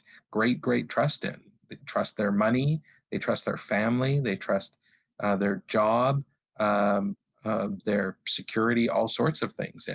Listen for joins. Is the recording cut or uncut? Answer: uncut